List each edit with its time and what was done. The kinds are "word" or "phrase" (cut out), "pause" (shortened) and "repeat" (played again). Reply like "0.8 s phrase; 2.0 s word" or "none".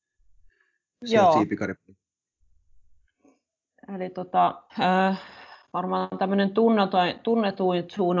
4.7 s pause